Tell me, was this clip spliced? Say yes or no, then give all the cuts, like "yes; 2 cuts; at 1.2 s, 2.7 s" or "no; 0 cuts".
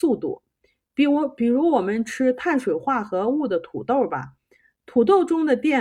no; 0 cuts